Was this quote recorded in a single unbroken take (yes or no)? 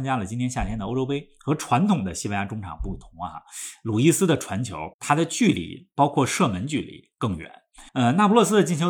no